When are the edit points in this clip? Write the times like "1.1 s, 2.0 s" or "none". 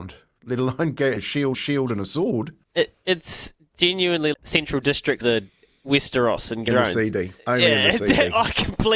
1.2 s, 1.5 s, 2.6 s, 4.3 s, 5.2 s, 6.7 s, 7.4 s